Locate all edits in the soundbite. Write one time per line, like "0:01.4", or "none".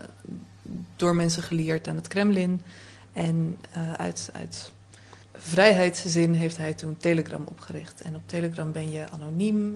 0:05.2